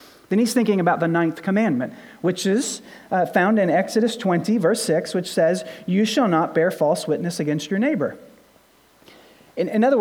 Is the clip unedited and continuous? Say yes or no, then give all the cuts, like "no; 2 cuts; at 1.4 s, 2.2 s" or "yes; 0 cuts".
yes; 0 cuts